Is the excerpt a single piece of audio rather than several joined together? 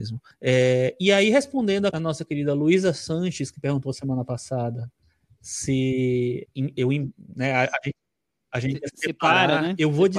no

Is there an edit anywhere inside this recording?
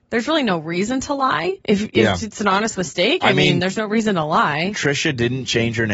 yes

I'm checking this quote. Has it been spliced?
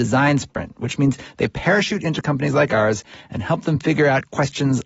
no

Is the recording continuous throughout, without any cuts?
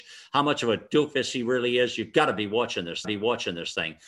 no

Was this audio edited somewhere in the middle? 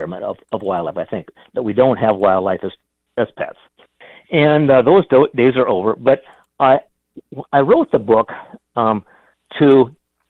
no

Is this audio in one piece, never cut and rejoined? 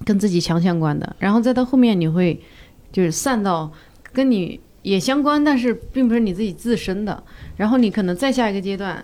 yes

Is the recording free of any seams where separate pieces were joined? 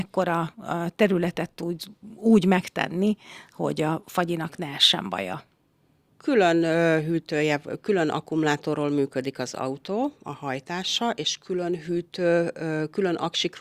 yes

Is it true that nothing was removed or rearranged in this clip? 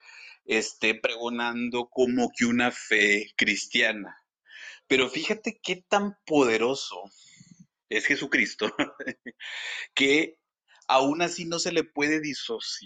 yes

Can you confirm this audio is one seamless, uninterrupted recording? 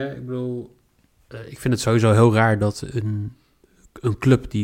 yes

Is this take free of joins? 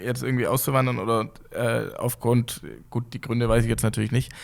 yes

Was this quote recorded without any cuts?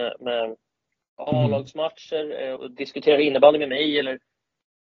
no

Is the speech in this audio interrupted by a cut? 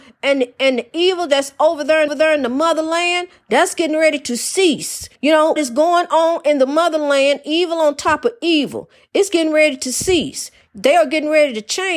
yes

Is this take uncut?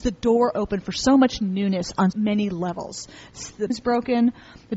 no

